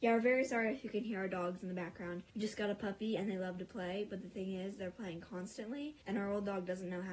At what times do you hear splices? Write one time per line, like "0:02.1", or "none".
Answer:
0:02.3
0:06.0